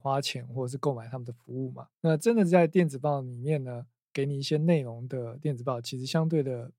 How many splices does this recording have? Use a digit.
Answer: 1